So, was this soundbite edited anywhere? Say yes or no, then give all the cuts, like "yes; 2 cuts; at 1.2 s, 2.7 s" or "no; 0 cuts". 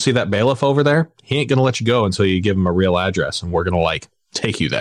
no; 0 cuts